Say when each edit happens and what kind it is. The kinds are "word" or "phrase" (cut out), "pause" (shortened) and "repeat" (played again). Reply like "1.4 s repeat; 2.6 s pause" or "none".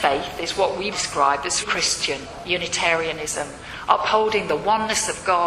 0.9 s word; 1.6 s word